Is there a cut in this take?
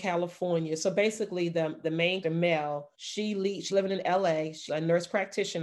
yes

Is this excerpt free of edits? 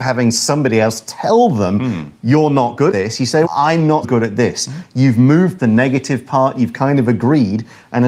no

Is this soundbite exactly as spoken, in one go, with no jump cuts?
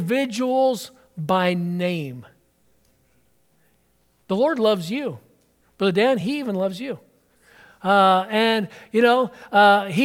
yes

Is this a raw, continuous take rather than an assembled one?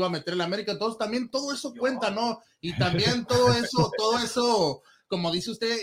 yes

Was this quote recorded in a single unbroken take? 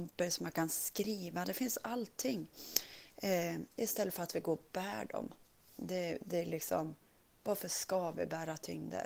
yes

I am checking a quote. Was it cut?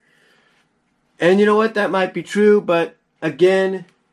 no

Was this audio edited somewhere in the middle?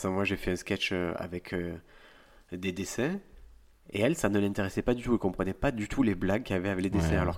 no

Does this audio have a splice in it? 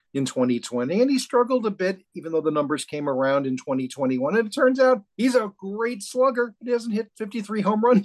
yes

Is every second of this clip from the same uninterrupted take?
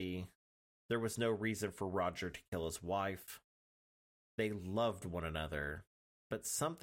yes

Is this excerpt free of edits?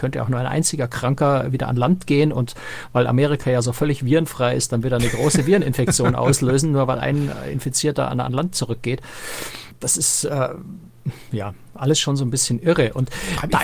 yes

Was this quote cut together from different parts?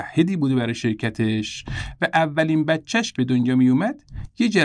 yes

